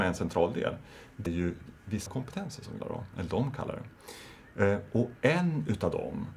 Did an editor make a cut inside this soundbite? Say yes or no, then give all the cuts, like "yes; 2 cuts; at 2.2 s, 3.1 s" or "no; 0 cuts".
yes; 3 cuts; at 1.3 s, 2.1 s, 2.8 s